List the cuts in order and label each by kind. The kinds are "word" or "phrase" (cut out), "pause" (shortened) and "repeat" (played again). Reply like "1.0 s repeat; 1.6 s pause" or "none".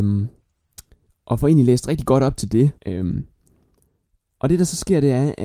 2.8 s pause

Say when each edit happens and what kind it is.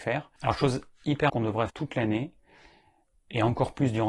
1.3 s word; 1.7 s word

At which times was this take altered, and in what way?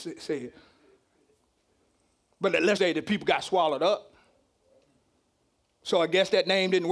2.8 s word

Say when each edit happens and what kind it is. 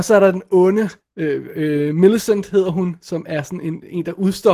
1.0 s pause

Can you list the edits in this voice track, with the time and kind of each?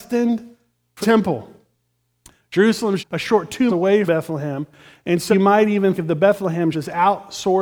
1.0 s word; 3.0 s word; 3.7 s word; 4.1 s word; 5.3 s word; 6.0 s word; 6.7 s word

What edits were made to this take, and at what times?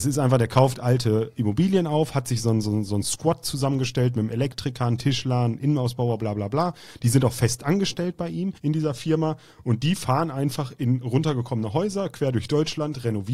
8.6 s pause

